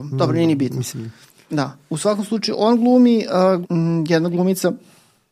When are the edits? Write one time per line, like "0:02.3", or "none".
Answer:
0:03.6